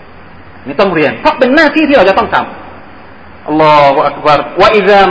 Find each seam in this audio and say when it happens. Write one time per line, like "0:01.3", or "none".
0:02.8